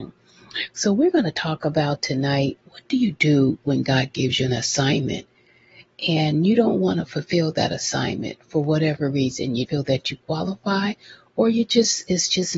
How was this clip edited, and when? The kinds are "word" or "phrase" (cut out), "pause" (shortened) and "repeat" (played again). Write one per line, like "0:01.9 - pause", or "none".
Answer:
0:02.6 - pause
0:09.6 - word